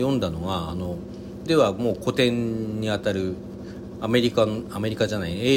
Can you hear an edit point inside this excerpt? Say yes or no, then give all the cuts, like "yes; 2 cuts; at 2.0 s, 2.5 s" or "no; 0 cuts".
yes; 1 cut; at 1.5 s